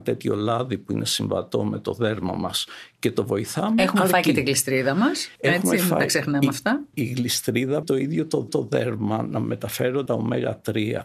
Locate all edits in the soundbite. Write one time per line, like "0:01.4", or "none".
0:05.4
0:06.9
0:07.8
0:08.5
0:10.1